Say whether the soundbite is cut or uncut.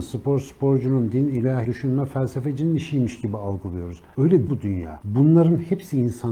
cut